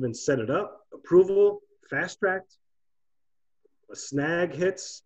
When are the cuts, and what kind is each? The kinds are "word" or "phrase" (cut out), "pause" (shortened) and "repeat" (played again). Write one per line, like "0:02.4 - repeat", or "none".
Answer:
none